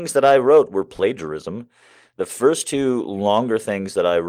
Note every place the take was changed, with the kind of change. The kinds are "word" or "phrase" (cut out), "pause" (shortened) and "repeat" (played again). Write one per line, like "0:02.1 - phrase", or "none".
none